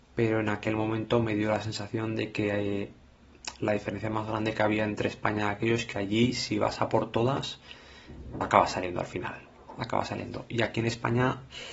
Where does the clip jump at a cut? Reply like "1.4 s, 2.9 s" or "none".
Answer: 8.4 s

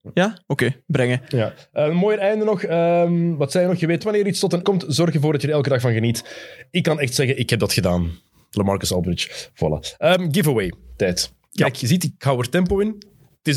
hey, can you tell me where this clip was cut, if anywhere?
4.0 s, 4.6 s

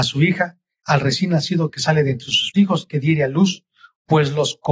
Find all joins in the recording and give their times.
2.5 s

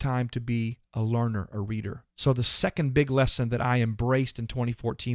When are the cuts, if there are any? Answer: 2.1 s

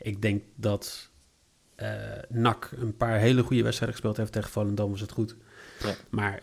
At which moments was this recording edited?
none

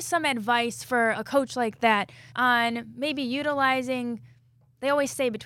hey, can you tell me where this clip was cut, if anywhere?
1.1 s, 2.3 s

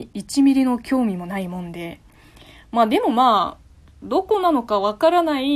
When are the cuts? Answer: none

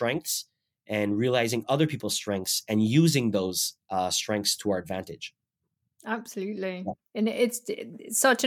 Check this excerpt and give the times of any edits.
none

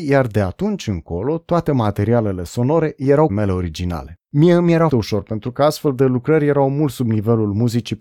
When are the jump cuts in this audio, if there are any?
3.3 s, 4.2 s, 4.9 s

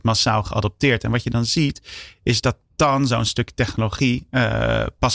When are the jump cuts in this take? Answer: none

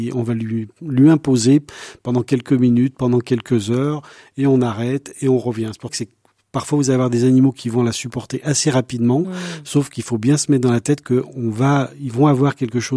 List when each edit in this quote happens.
5.9 s

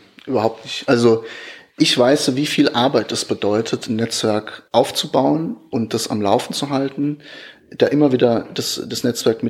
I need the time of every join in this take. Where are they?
4.7 s

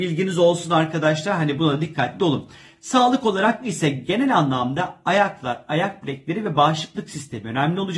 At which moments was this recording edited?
none

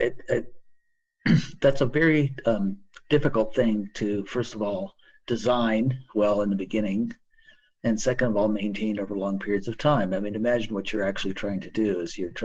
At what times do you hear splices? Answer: none

